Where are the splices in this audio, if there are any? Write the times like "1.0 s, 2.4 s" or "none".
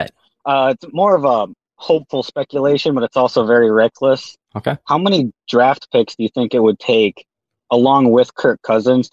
none